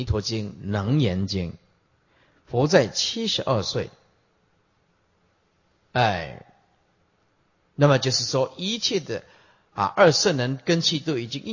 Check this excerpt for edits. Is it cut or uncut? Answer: uncut